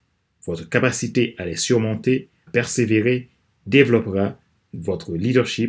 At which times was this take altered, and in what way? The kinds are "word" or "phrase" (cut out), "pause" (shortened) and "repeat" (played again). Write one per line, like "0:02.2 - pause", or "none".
0:02.5 - word